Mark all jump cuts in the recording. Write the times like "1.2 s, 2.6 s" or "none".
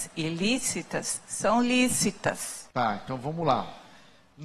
2.7 s